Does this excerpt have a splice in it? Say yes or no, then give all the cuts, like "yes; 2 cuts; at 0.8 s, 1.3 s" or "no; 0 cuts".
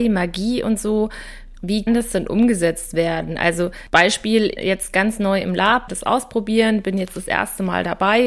yes; 3 cuts; at 1.9 s, 4.6 s, 5.9 s